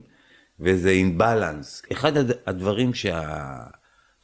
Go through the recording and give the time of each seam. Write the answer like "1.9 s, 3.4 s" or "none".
1.9 s

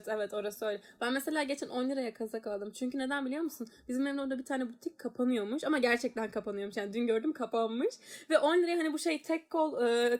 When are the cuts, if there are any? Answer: none

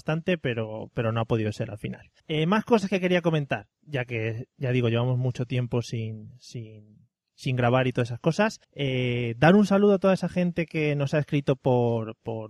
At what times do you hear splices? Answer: 2.2 s, 3.7 s, 8.6 s

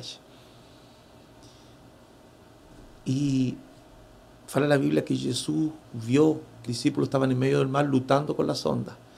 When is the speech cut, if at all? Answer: 3.9 s, 5.8 s, 6.7 s

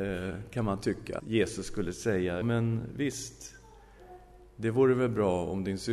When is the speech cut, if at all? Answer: 1.2 s, 2.4 s

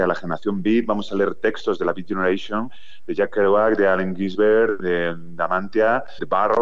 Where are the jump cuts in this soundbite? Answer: none

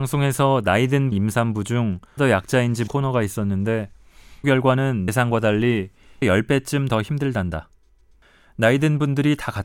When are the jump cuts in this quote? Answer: 1.1 s, 2.2 s, 2.9 s, 4.4 s, 5.1 s, 6.2 s

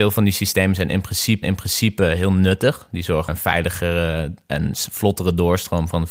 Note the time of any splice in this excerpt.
1.4 s, 3.3 s

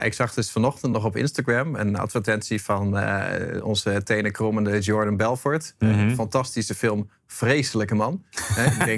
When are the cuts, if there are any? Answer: none

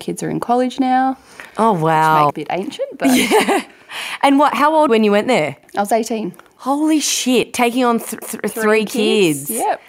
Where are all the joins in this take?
2.3 s, 4.9 s, 8.2 s

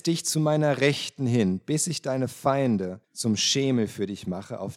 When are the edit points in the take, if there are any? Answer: 3.0 s

